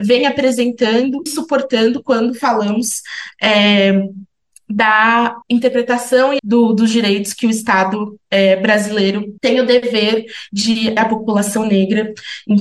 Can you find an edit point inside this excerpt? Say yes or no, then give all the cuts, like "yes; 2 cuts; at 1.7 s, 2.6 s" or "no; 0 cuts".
yes; 5 cuts; at 1.3 s, 5.4 s, 6.4 s, 9.4 s, 11.0 s